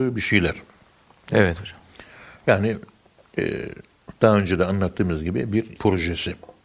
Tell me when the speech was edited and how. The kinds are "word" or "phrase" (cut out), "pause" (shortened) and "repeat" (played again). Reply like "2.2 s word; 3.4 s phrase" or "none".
5.8 s word